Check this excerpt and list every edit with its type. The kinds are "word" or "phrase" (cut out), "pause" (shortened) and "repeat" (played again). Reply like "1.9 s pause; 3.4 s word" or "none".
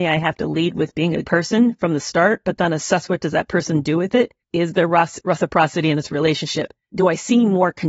1.2 s word; 4.4 s pause; 6.8 s pause